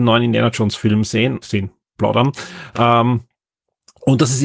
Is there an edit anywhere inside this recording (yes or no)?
yes